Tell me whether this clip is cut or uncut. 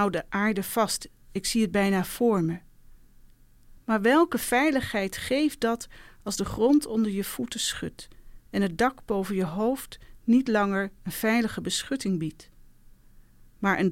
uncut